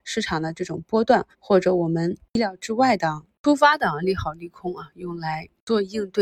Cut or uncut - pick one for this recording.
cut